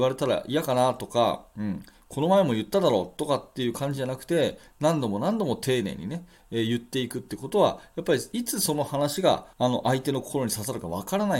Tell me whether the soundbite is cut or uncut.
cut